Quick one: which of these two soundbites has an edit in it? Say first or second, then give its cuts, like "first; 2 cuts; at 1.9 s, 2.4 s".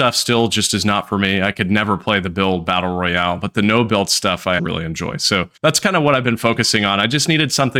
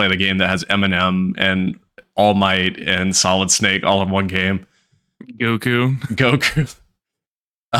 first; 2 cuts; at 4.6 s, 5.6 s